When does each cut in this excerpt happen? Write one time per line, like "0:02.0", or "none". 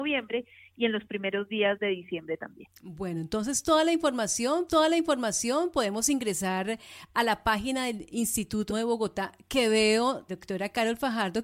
0:04.7
0:08.7
0:10.3